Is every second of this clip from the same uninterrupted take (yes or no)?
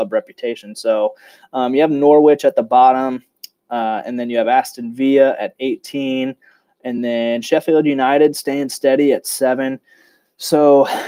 yes